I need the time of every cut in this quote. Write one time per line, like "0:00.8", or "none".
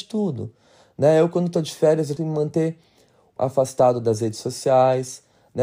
0:02.2
0:03.4